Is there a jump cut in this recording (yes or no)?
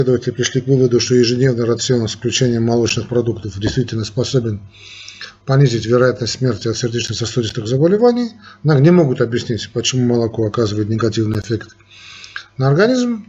no